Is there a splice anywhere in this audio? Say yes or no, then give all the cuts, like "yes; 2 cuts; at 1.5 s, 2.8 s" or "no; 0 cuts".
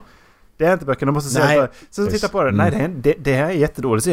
yes; 1 cut; at 2.1 s